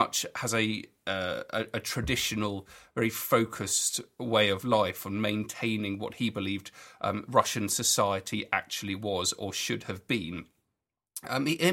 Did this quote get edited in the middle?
no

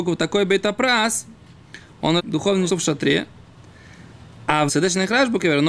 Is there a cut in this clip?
yes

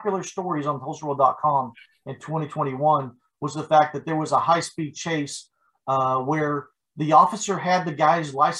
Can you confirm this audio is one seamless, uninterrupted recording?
yes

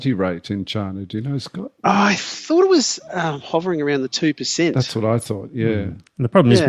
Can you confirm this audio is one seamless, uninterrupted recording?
no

